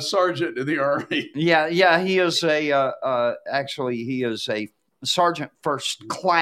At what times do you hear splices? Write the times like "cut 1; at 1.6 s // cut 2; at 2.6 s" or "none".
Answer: none